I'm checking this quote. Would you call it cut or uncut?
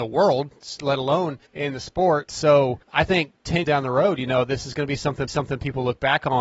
cut